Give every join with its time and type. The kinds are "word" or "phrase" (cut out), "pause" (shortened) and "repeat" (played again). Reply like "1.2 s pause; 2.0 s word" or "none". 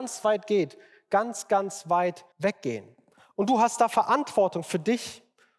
2.3 s pause